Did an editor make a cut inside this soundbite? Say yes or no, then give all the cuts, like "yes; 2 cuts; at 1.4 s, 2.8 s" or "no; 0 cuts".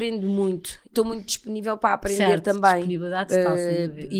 yes; 1 cut; at 0.9 s